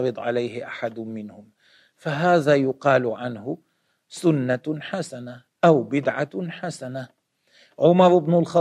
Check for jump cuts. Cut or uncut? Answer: uncut